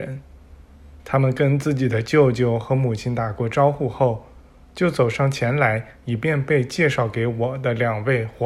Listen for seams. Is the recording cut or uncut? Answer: uncut